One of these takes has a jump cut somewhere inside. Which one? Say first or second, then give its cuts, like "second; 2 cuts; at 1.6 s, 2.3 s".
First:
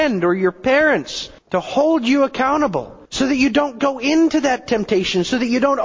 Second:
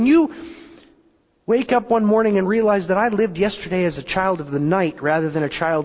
first; 2 cuts; at 1.4 s, 3.1 s